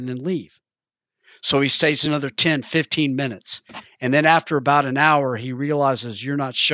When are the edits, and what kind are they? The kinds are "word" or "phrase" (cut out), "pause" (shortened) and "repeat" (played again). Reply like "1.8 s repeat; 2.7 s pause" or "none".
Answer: none